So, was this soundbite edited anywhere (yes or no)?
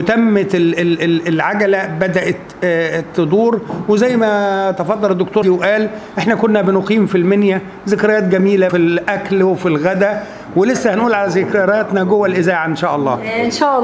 yes